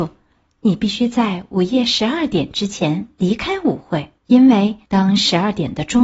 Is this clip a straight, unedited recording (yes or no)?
no